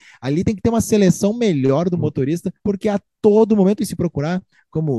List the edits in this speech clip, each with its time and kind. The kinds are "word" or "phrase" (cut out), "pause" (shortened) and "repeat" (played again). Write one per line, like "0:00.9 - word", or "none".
0:03.8 - word